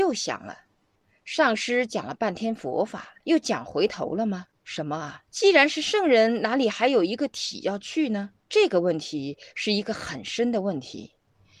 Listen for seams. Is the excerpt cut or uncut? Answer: cut